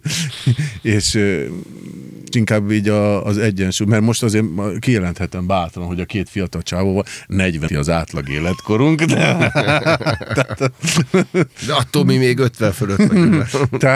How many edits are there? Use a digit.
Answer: 2